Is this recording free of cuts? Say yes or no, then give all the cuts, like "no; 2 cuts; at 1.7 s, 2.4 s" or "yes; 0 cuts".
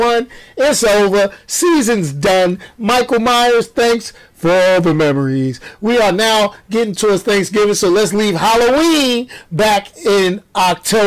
yes; 0 cuts